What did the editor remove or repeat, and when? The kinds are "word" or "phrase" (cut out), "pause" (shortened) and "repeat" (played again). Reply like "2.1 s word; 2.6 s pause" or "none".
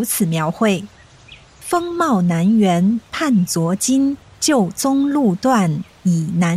0.9 s pause; 4.2 s pause